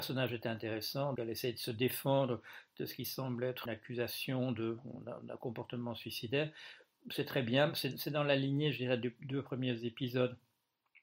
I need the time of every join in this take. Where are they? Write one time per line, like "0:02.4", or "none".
0:01.2
0:03.7